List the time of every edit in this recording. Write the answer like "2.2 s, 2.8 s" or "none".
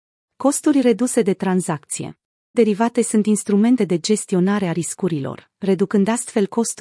2.5 s, 3.8 s